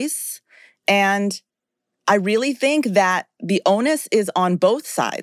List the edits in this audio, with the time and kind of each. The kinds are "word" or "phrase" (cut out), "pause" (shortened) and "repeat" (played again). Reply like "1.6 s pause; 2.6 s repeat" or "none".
none